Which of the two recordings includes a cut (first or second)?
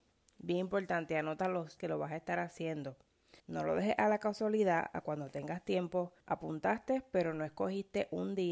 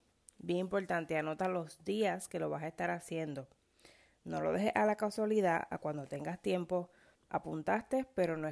first